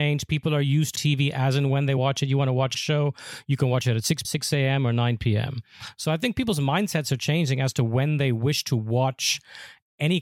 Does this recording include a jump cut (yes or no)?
yes